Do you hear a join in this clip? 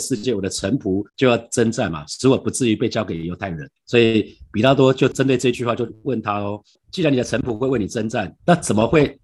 yes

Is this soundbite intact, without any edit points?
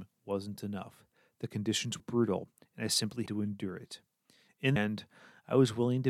no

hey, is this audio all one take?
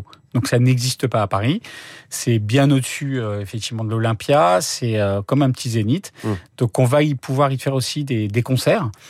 yes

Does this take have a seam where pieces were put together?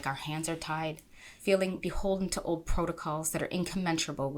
no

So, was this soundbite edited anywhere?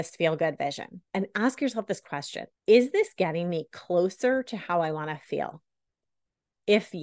yes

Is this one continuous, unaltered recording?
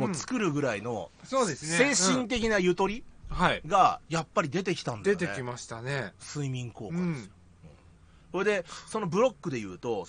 no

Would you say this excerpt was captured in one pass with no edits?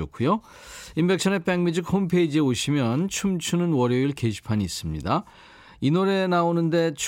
yes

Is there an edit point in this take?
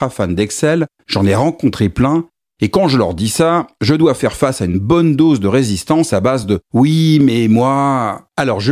no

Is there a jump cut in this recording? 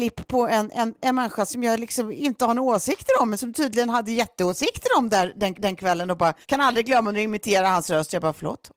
yes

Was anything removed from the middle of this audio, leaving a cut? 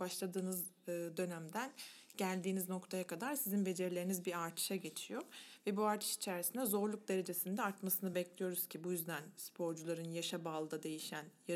no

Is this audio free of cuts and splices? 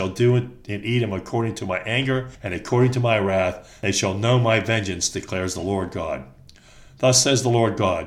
no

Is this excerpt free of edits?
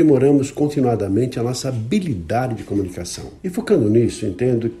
no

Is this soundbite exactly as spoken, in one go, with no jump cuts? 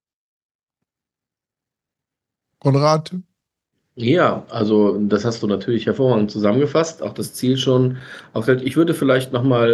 yes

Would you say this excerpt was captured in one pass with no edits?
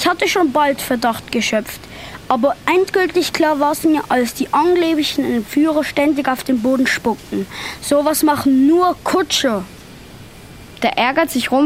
yes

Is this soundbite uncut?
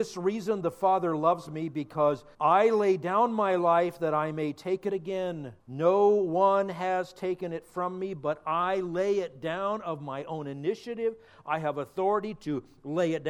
no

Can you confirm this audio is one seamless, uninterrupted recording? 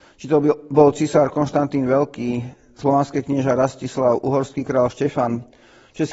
yes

